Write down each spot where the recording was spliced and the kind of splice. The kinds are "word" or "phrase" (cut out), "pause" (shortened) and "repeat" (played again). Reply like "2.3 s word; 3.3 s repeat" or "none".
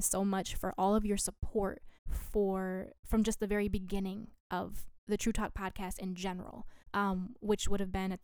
2.0 s pause; 5.0 s pause; 6.8 s pause